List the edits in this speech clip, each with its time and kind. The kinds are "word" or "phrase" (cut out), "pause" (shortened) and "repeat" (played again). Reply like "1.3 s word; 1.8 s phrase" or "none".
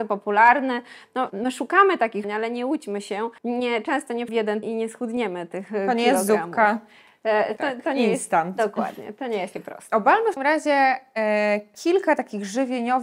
1.3 s word; 2.2 s phrase; 3.4 s pause; 4.3 s word; 4.6 s word; 7.6 s word; 9.5 s word; 10.4 s word